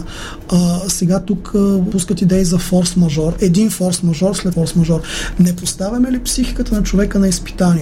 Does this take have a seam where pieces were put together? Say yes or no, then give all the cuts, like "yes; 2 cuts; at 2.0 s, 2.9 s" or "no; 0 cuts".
yes; 2 cuts; at 1.9 s, 4.5 s